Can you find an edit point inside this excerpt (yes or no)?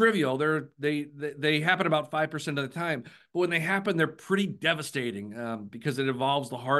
no